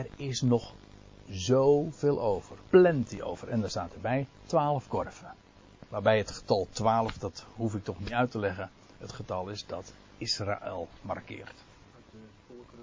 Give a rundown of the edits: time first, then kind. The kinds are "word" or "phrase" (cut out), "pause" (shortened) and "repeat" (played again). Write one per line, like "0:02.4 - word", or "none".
0:02.6 - pause